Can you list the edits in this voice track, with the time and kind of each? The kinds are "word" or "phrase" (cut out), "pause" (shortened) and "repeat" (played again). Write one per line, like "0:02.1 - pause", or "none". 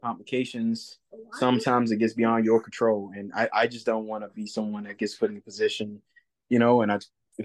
none